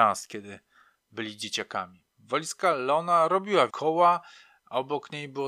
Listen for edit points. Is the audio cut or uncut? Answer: cut